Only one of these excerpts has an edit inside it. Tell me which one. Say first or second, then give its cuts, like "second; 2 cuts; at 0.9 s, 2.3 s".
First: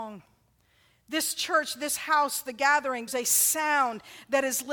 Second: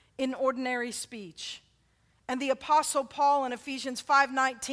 first; 1 cut; at 3.1 s